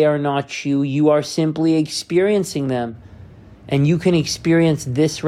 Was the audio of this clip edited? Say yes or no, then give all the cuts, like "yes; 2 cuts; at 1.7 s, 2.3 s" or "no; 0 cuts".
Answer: no; 0 cuts